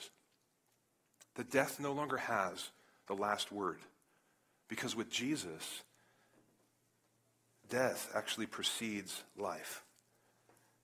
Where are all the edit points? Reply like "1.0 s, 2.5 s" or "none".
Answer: none